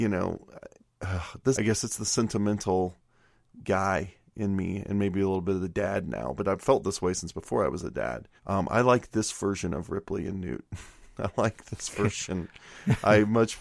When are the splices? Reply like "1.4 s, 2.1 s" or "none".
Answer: 1.5 s, 8.4 s